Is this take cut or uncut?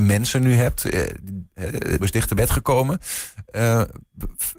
cut